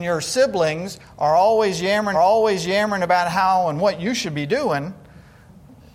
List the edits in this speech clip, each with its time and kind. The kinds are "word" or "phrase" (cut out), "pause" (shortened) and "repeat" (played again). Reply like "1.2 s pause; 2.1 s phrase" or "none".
2.1 s repeat

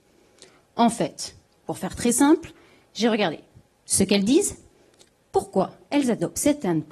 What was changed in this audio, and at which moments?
none

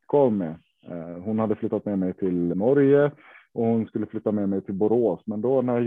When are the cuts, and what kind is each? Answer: 2.5 s word

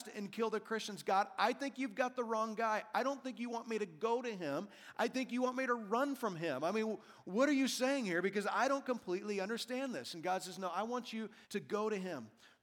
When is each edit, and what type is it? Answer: 11.4 s pause

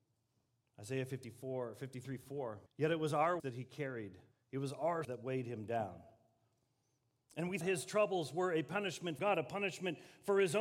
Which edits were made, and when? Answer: 2.7 s pause; 3.4 s word; 4.3 s pause; 5.0 s word; 7.6 s word; 9.2 s word

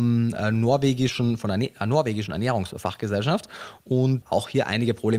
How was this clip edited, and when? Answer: 4.2 s phrase

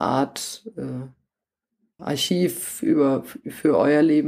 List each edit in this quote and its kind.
2.0 s word

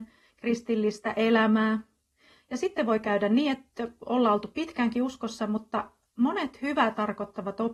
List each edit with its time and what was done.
none

